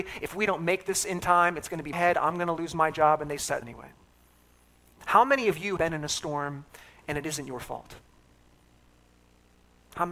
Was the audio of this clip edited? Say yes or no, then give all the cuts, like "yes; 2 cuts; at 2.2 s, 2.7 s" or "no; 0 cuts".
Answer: yes; 3 cuts; at 1.9 s, 3.6 s, 5.8 s